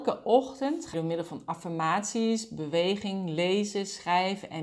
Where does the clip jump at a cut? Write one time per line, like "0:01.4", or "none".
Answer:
0:00.9